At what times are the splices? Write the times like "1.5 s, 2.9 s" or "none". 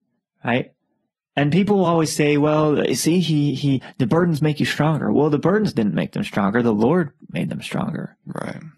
none